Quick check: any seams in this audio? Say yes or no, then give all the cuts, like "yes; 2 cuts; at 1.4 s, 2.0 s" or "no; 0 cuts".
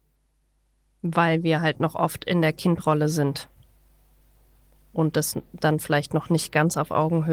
no; 0 cuts